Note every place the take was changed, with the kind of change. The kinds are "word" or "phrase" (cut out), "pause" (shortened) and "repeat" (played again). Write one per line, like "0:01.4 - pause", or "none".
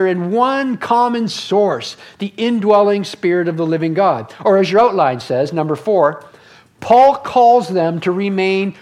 none